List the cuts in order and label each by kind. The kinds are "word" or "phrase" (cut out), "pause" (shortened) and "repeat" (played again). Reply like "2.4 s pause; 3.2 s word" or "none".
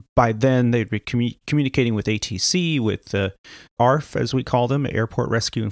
1.4 s pause; 3.8 s phrase